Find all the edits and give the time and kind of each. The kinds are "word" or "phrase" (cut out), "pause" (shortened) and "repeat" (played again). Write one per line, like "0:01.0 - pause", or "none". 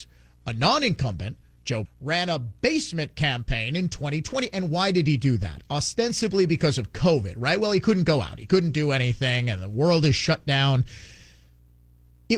0:01.9 - word